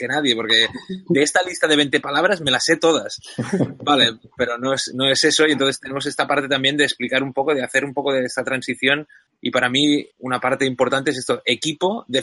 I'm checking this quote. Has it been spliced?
yes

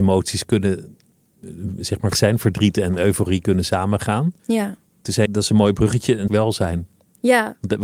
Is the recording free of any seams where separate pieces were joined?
no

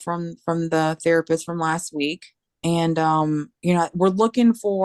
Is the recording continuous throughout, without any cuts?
no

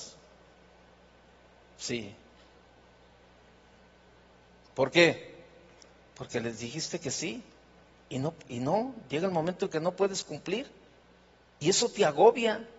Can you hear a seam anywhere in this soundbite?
no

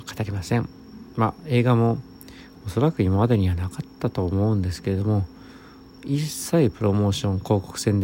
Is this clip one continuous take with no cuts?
yes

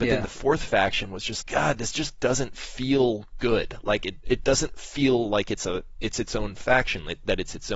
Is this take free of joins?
no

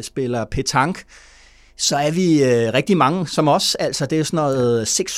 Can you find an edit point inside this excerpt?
no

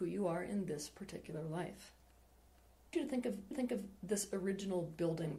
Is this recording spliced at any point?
yes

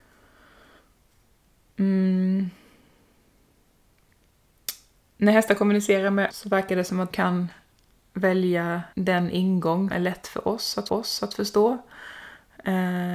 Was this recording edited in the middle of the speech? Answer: yes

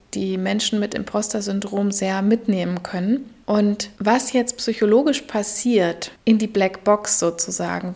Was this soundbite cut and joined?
yes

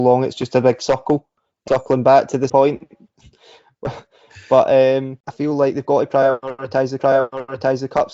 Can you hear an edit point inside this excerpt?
yes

